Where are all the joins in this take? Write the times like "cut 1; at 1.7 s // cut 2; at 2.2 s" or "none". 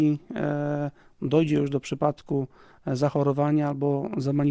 none